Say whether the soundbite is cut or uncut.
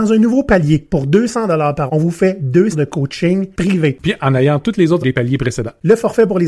cut